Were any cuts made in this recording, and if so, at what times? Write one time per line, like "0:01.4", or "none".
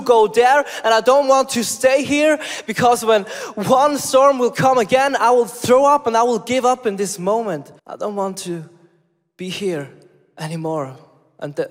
0:07.8